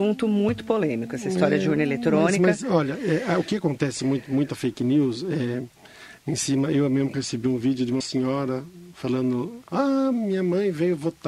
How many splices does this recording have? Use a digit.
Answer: 2